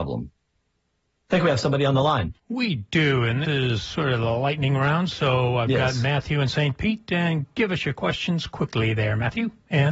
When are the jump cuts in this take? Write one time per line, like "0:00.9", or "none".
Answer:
0:02.4
0:03.4